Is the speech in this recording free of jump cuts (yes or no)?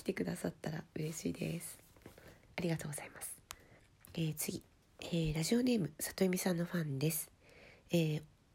no